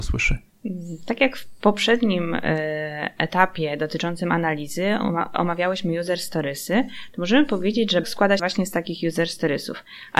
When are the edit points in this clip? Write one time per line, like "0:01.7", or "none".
0:08.0
0:08.4

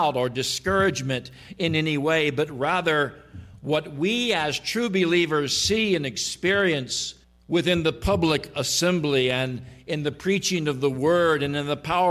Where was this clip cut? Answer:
0:07.2

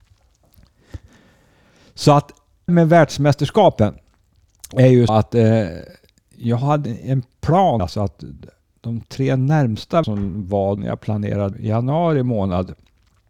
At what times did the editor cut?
0:02.7
0:05.1
0:06.9
0:07.8
0:10.0
0:10.8
0:11.5

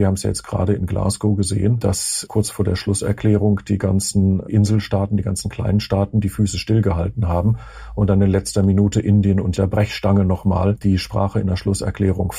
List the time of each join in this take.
0:04.5
0:09.6

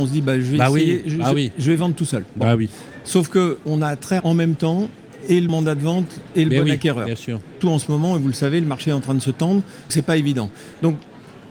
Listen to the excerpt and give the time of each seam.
0:04.2
0:05.5
0:07.6
0:09.9

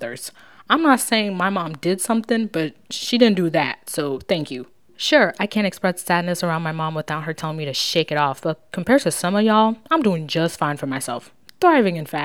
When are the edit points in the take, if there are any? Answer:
none

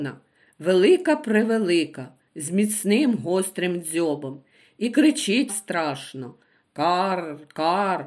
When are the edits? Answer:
0:05.5

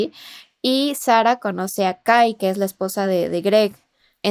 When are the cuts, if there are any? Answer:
none

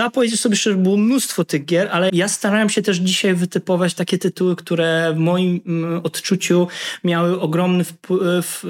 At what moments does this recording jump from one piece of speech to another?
0:02.1

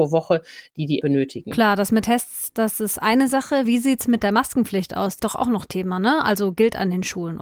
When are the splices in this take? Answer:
0:01.0
0:02.0
0:05.2

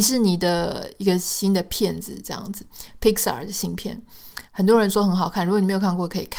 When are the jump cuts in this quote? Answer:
0:04.5

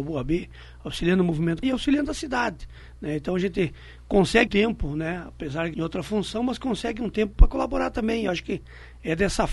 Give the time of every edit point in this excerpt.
0:01.6
0:04.5
0:05.7

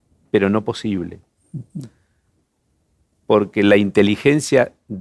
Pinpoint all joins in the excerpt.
none

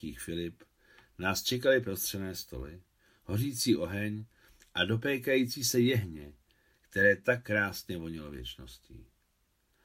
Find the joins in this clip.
none

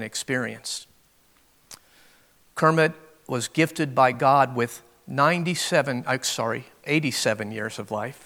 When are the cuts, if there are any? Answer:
none

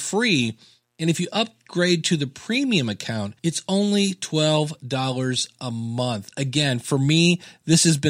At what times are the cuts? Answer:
0:03.4

